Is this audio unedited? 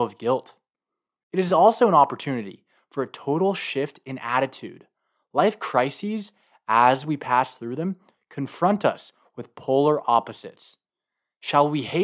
yes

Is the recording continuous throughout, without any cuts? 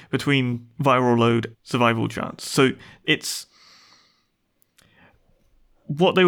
no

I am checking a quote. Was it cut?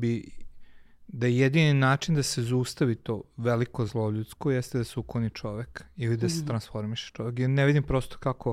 no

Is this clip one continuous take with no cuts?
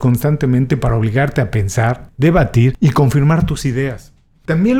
yes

